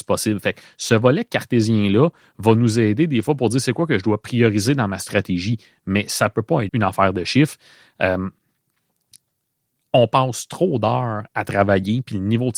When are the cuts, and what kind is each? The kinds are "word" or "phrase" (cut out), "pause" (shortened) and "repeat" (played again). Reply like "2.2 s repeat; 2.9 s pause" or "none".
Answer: 6.7 s word